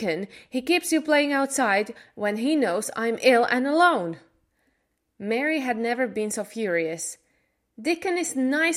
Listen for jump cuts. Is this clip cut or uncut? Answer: uncut